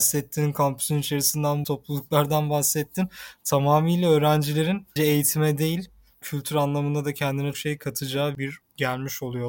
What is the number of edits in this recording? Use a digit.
5